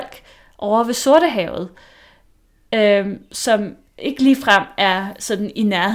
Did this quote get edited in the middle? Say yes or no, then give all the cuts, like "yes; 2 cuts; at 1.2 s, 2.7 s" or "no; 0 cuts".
no; 0 cuts